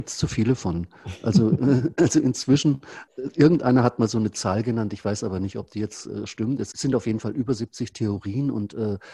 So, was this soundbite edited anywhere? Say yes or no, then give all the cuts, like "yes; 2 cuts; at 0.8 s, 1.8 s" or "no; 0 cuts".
yes; 1 cut; at 3.1 s